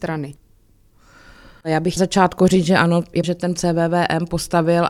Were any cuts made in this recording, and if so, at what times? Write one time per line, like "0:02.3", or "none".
0:02.0
0:03.2
0:03.6